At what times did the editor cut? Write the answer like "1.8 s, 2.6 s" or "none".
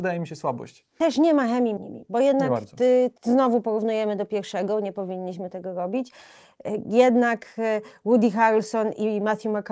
1.8 s, 3.2 s

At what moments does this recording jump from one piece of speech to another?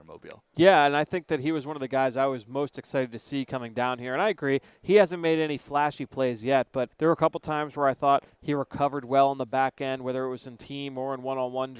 6.9 s

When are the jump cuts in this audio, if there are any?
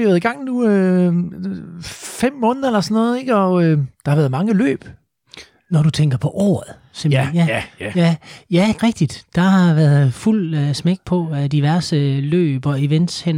8.8 s

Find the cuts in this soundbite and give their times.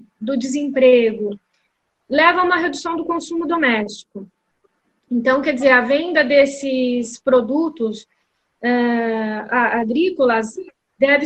none

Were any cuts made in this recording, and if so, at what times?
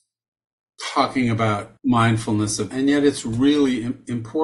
1.8 s, 2.7 s

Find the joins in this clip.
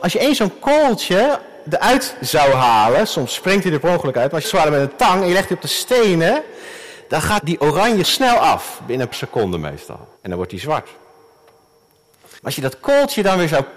4.4 s, 7.4 s, 8.0 s, 9.1 s, 10.2 s, 12.4 s

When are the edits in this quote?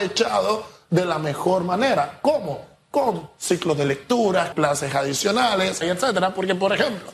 4.5 s, 5.8 s

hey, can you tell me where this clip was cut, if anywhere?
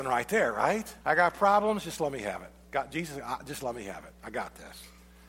1.0 s

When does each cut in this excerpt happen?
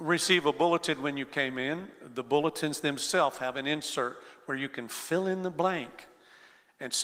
none

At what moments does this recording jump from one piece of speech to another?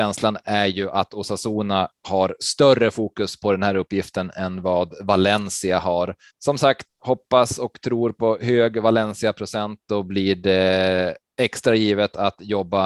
6.3 s, 6.9 s

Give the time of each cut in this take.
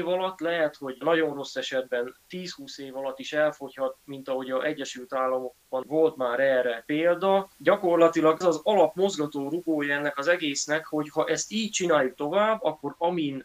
5.8 s, 8.4 s

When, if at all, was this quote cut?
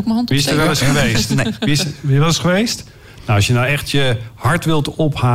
none

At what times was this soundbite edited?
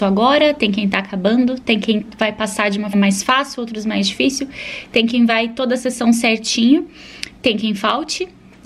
2.9 s

